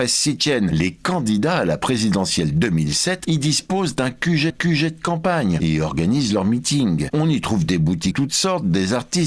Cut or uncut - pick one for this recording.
cut